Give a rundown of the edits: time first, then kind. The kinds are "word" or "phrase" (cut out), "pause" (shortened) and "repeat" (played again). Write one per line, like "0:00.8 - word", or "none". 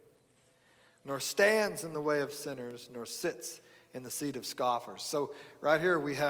none